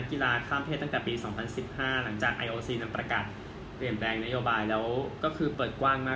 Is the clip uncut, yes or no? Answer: yes